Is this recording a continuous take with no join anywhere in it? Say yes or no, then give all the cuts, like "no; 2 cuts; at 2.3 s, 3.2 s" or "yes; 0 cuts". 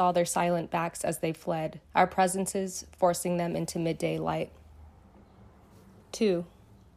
no; 1 cut; at 1.8 s